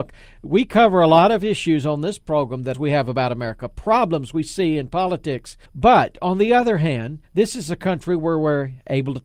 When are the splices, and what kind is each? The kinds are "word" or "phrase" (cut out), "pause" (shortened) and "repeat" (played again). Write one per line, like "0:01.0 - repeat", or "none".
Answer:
0:02.7 - phrase
0:05.7 - pause
0:07.2 - pause